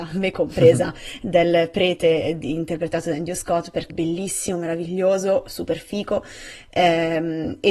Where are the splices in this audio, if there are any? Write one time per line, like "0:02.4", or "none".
0:03.9